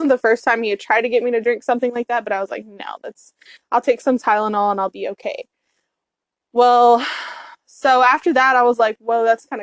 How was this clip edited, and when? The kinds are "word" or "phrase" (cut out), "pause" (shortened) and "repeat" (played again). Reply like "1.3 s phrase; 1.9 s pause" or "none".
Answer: none